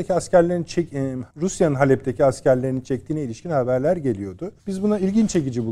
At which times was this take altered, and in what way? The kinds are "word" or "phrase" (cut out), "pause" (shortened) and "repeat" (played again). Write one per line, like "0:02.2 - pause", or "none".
0:01.3 - pause
0:04.6 - pause